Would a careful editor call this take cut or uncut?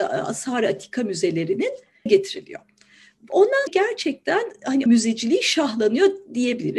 cut